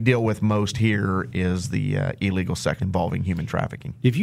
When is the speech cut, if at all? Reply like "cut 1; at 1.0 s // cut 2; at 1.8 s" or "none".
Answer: cut 1; at 2.8 s